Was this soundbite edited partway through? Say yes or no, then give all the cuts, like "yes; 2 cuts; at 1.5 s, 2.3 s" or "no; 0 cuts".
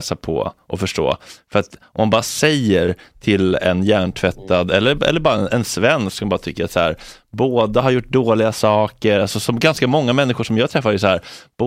no; 0 cuts